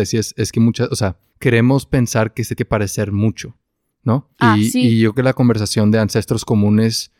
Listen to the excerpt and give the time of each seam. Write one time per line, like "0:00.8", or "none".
0:01.3
0:02.6
0:04.4
0:05.1